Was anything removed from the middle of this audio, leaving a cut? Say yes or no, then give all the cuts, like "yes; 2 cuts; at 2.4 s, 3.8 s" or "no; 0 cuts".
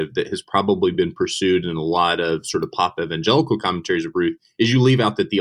no; 0 cuts